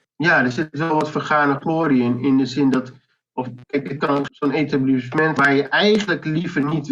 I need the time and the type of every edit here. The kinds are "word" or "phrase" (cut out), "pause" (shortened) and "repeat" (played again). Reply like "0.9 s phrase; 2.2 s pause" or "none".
3.6 s pause; 4.3 s word; 5.4 s word